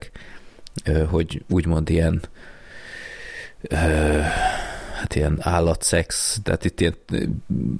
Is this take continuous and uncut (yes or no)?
yes